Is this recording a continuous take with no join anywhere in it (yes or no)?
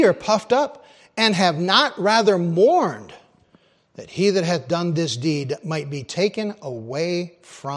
yes